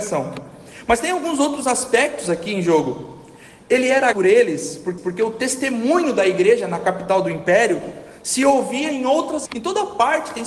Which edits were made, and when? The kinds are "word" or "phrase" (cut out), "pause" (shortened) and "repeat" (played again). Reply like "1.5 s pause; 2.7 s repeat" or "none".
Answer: 4.1 s word; 5.0 s repeat; 9.5 s word